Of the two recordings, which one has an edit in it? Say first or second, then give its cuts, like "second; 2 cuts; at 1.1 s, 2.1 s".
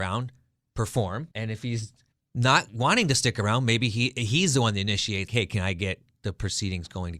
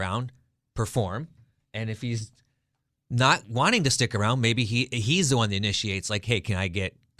first; 3 cuts; at 1.3 s, 2.1 s, 5.3 s